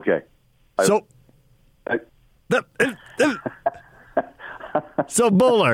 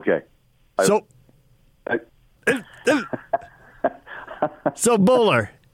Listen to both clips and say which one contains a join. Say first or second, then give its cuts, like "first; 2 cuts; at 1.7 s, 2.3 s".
second; 1 cut; at 2.4 s